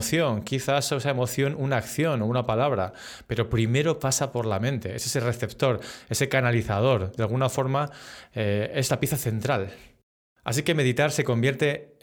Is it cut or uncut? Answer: uncut